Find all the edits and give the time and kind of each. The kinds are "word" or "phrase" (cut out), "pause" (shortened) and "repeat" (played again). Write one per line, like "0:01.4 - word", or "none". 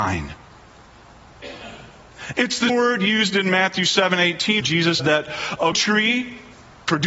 0:02.7 - word
0:04.6 - word
0:05.0 - word
0:05.7 - word